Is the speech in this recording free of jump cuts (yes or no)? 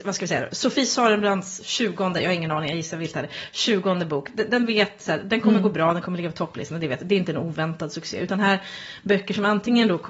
yes